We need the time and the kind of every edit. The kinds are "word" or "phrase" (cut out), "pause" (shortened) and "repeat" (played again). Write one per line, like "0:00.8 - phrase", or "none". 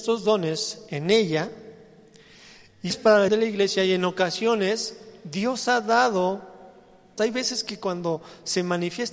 0:02.9 - word
0:03.3 - word
0:07.2 - word